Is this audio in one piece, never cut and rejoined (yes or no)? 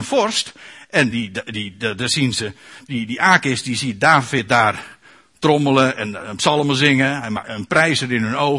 yes